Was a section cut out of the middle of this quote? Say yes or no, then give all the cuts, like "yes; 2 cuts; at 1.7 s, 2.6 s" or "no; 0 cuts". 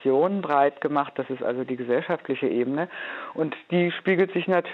no; 0 cuts